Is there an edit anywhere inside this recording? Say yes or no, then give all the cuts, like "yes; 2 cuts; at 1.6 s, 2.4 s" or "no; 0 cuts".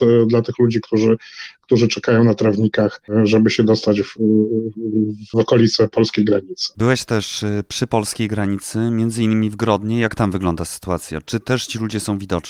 no; 0 cuts